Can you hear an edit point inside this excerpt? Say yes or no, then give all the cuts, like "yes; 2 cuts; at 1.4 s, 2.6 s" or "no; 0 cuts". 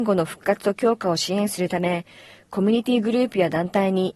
no; 0 cuts